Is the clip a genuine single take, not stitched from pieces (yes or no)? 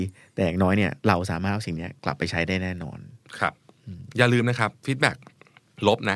no